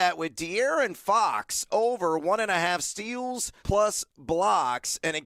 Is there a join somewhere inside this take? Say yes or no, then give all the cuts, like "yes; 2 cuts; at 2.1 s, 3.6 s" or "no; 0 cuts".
yes; 1 cut; at 3.6 s